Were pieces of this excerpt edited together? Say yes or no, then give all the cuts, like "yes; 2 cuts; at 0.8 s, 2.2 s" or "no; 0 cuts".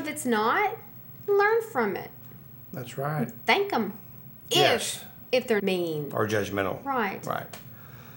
yes; 1 cut; at 5.6 s